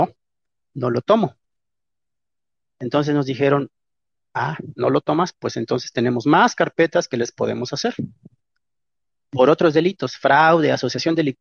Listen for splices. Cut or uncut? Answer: uncut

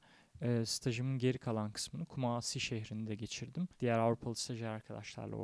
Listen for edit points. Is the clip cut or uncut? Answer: cut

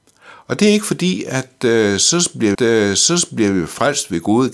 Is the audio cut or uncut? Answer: cut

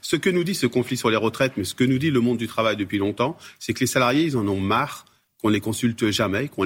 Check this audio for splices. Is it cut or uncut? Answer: uncut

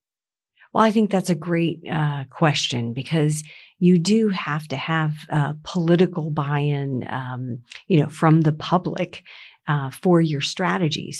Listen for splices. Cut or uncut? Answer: uncut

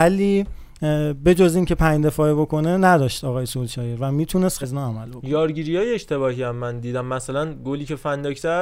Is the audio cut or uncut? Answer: cut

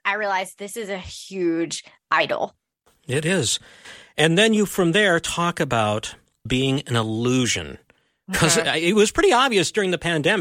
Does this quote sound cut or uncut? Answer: cut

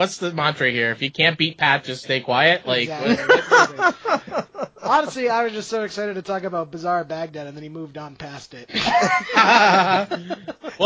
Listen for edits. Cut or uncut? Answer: uncut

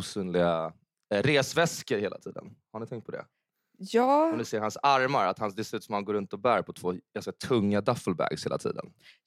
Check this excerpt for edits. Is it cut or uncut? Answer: uncut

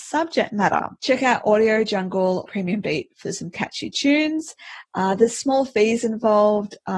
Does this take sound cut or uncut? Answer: cut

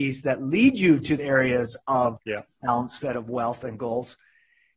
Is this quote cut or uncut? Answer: cut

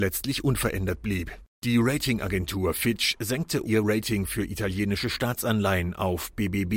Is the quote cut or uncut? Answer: cut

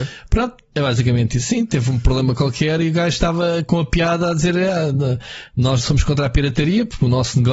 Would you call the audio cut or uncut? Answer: cut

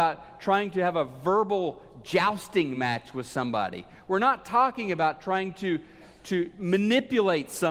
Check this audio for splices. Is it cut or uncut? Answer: uncut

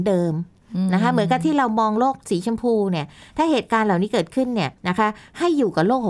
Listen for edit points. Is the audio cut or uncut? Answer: cut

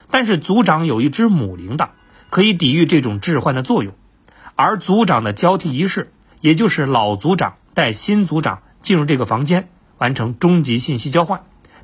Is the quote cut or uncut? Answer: uncut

